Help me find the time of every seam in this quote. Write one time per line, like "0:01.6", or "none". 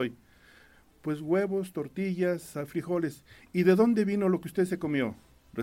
none